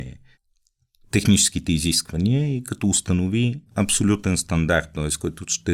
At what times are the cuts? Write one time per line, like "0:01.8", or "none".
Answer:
0:03.7